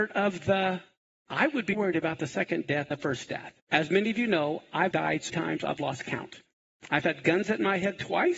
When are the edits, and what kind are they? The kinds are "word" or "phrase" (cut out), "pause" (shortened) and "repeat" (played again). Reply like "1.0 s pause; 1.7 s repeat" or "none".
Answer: 1.7 s word; 2.9 s word; 3.6 s pause; 4.9 s word; 5.3 s word